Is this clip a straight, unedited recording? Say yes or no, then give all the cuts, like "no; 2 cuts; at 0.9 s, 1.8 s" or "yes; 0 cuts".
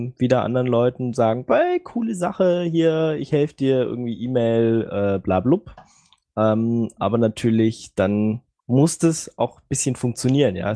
yes; 0 cuts